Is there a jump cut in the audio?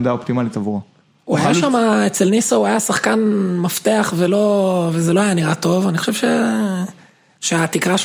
no; 0 cuts

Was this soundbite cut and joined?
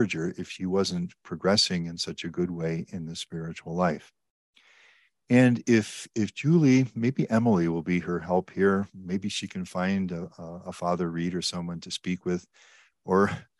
no; 0 cuts

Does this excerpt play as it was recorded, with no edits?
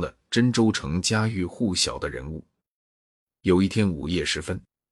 yes; 0 cuts

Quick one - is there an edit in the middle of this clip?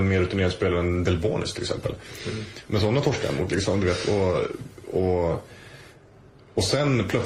no; 0 cuts

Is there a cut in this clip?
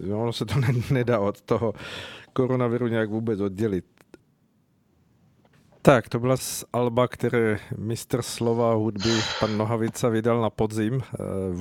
yes; 1 cut; at 6.4 s

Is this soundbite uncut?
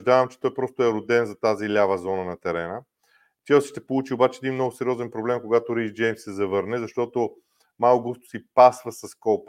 yes; 0 cuts

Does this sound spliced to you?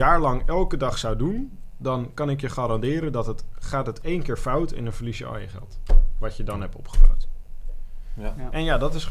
no; 0 cuts

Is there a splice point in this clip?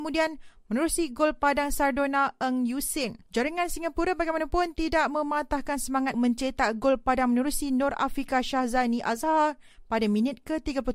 yes; 2 cuts; at 3.3 s, 6.1 s

